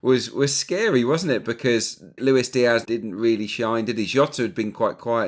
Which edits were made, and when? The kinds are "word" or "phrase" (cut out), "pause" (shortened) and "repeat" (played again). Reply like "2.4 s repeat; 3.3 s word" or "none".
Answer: 2.2 s word; 2.8 s word